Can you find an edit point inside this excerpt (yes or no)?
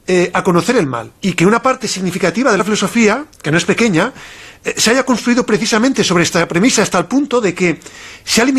yes